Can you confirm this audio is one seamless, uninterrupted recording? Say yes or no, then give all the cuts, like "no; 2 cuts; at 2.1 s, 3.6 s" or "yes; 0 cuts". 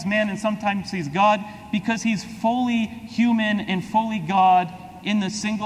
yes; 0 cuts